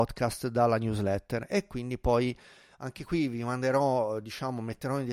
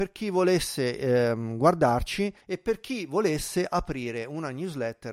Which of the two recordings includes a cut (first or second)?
second